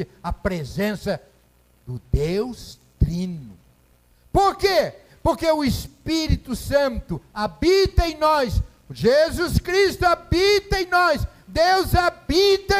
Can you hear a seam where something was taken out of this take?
no; 0 cuts

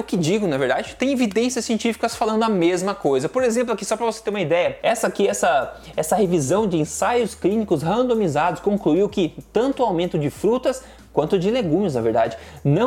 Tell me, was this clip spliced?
no; 0 cuts

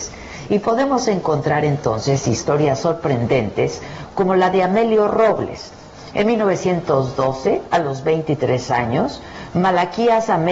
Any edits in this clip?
no; 0 cuts

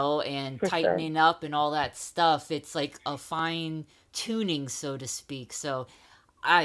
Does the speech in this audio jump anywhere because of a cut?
no; 0 cuts

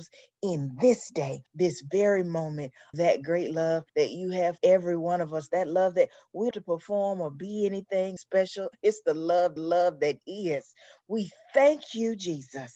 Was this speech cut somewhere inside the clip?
yes; 7 cuts; at 1.5 s, 2.9 s, 3.9 s, 4.6 s, 6.5 s, 8.2 s, 9.6 s

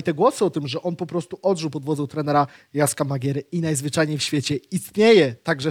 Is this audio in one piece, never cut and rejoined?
yes; 0 cuts

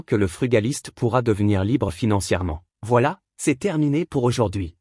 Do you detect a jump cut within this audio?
yes; 1 cut; at 2.7 s

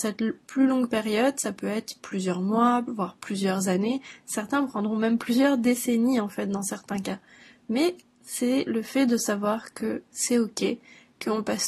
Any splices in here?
no; 0 cuts

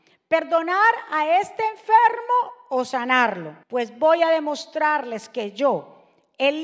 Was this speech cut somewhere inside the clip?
yes; 1 cut; at 3.6 s

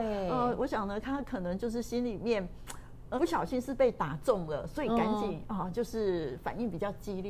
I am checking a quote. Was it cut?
yes; 1 cut; at 3.2 s

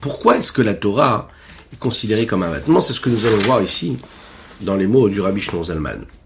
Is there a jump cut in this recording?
no; 0 cuts

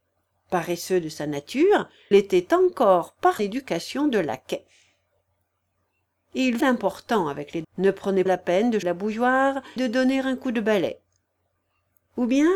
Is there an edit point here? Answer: yes; 7 cuts; at 2.1 s, 3.4 s, 6.6 s, 7.6 s, 8.3 s, 8.8 s, 9.8 s

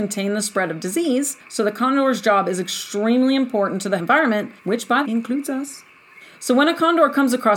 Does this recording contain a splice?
yes; 5 cuts; at 1.4 s, 4.0 s, 4.6 s, 5.0 s, 6.2 s

